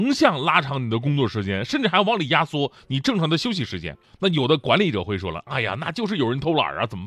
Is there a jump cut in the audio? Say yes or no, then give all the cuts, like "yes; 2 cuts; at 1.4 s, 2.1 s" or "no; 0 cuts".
yes; 1 cut; at 4.0 s